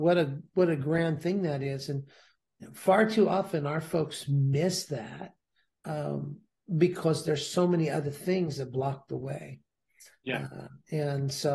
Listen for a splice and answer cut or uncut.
uncut